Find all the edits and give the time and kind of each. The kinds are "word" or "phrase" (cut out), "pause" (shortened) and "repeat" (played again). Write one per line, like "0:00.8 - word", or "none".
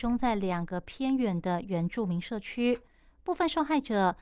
none